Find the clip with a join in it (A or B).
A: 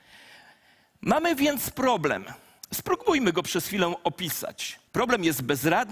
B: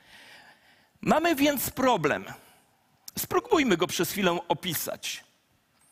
A